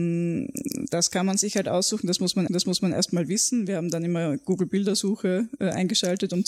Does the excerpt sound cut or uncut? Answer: cut